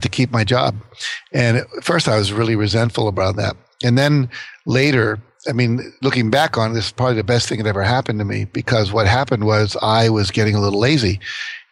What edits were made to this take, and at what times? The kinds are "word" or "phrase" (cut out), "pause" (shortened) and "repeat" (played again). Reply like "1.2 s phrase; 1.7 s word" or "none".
none